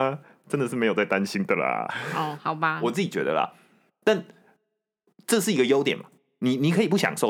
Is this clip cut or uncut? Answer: uncut